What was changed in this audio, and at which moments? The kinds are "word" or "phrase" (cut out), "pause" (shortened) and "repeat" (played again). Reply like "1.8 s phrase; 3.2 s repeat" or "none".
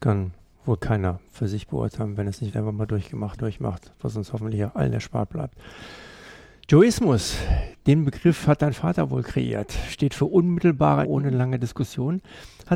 2.5 s word; 3.4 s word; 11.0 s word